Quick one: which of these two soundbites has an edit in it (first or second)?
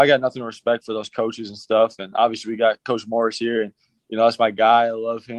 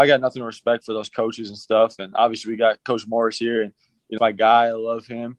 second